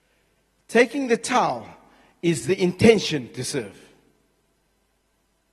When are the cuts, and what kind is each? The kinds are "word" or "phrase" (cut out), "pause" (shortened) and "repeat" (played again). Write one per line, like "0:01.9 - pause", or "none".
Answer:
none